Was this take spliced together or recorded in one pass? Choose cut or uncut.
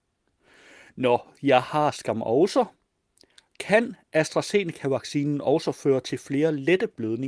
uncut